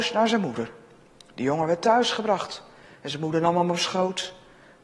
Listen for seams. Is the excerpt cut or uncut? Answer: uncut